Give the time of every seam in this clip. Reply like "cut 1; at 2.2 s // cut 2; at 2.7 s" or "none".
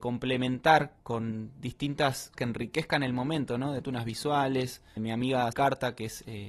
cut 1; at 1.0 s // cut 2; at 2.3 s // cut 3; at 3.8 s // cut 4; at 5.0 s // cut 5; at 5.5 s